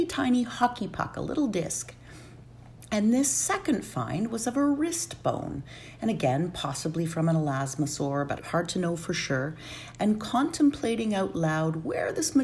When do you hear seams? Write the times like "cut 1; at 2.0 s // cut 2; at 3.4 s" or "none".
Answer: cut 1; at 8.4 s